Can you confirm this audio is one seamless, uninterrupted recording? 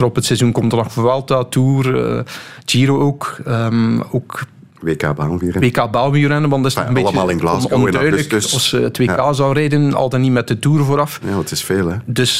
yes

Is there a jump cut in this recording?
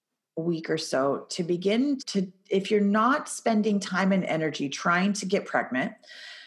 yes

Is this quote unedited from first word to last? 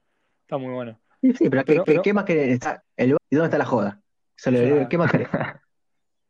no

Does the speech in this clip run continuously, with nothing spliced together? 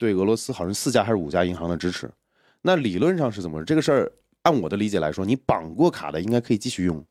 yes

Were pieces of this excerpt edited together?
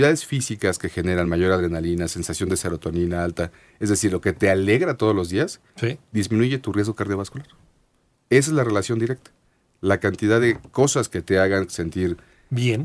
no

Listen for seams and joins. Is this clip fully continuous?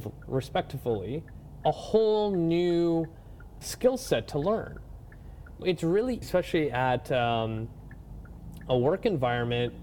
no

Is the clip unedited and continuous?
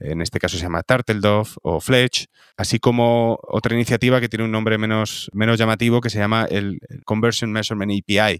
no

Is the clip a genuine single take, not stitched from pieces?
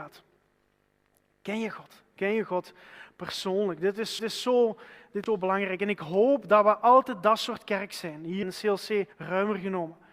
no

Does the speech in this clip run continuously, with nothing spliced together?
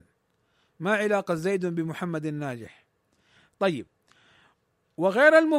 yes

